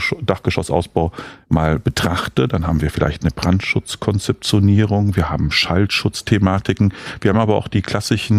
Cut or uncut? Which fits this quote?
uncut